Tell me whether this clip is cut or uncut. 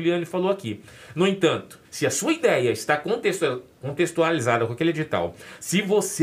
cut